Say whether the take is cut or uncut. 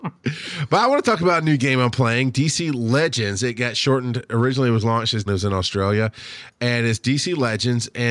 cut